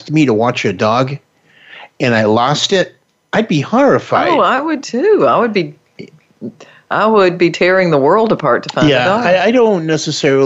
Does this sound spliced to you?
no; 0 cuts

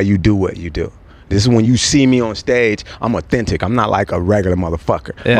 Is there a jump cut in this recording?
no; 0 cuts

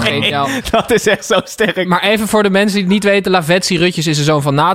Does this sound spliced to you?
no; 0 cuts

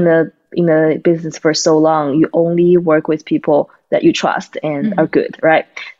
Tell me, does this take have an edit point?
no; 0 cuts

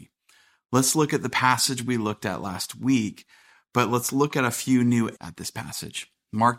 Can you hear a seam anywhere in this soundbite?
yes; 1 cut; at 5.2 s

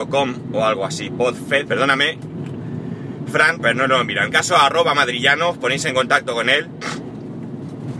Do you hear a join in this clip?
yes; 3 cuts; at 1.7 s, 3.6 s, 4.3 s

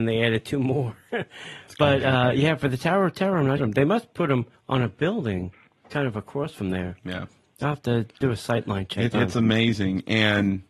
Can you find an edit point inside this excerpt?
yes; 4 cuts; at 3.6 s, 4.5 s, 8.1 s, 9.1 s

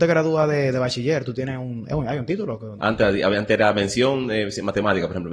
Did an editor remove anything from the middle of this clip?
no; 0 cuts

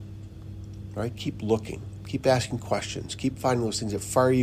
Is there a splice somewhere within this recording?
no; 0 cuts

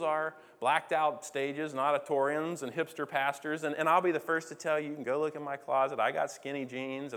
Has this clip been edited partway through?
no; 0 cuts

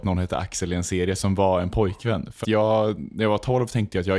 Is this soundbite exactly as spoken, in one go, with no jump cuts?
no; 1 cut; at 2.4 s

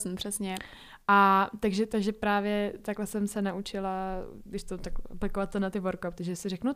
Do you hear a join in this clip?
no; 0 cuts

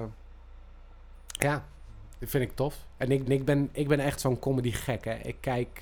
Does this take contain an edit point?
yes; 1 cut; at 3.3 s

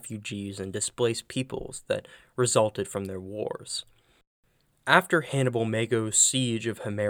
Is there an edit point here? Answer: no; 0 cuts

